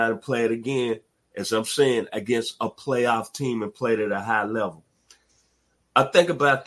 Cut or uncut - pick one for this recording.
uncut